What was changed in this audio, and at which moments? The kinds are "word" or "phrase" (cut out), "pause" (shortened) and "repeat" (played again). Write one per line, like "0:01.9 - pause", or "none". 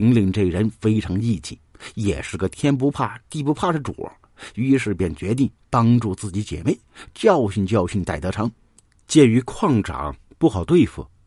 none